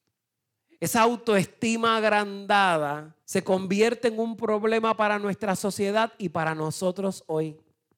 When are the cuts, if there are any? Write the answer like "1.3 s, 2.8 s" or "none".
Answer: 3.2 s